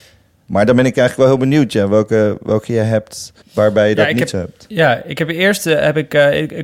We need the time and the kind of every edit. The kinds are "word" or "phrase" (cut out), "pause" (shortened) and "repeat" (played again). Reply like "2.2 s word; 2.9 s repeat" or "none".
3.4 s pause